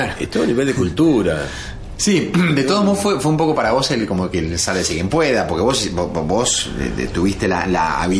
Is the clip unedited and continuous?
yes; 0 cuts

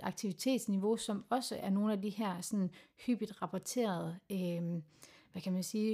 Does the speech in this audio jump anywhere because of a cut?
no; 0 cuts

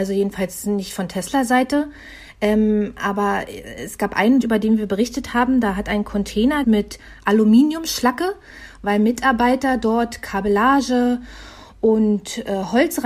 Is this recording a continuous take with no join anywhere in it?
no; 2 cuts; at 4.4 s, 6.6 s

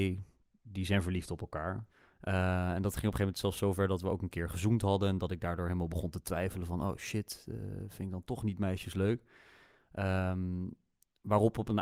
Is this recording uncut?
yes; 0 cuts

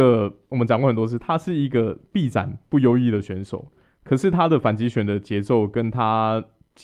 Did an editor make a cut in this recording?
no; 0 cuts

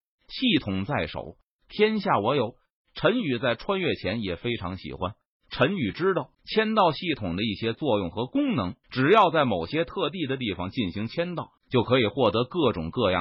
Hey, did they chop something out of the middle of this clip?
yes; 3 cuts; at 6.3 s, 8.8 s, 11.6 s

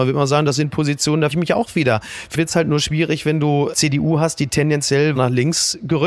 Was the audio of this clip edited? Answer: yes; 4 cuts; at 1.3 s, 2.3 s, 3.7 s, 5.2 s

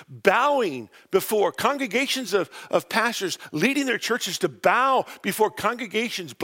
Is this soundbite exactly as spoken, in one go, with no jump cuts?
yes; 0 cuts

